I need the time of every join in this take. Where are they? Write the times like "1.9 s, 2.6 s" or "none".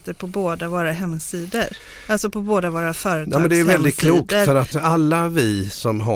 4.7 s